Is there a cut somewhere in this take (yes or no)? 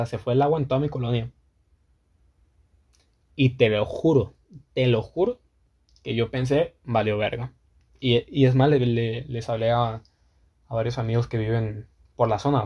no